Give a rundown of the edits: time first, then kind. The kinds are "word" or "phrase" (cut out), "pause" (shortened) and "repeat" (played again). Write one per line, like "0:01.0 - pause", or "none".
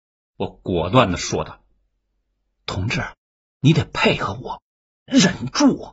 none